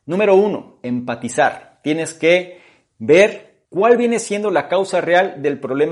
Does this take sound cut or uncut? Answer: cut